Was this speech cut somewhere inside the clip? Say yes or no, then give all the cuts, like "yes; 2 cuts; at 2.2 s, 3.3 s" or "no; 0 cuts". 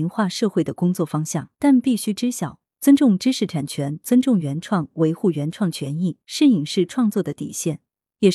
yes; 2 cuts; at 1.5 s, 6.2 s